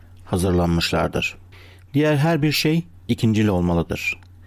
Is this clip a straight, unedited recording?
yes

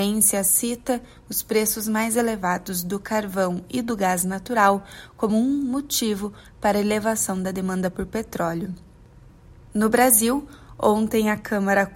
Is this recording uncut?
yes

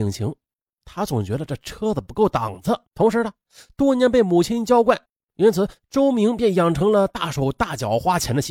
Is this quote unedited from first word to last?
no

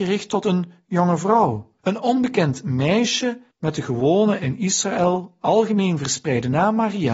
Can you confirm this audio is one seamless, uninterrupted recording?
no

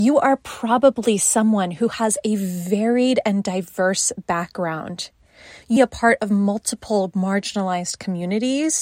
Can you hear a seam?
yes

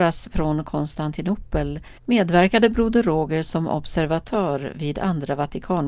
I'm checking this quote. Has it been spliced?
yes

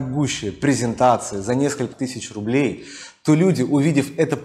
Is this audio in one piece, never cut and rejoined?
no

